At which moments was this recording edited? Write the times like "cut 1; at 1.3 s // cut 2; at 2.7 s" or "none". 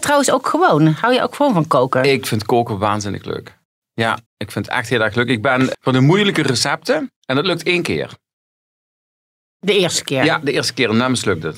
cut 1; at 4.3 s // cut 2; at 5.7 s // cut 3; at 7.2 s